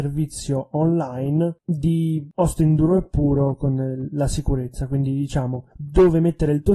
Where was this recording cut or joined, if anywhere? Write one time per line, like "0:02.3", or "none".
0:05.7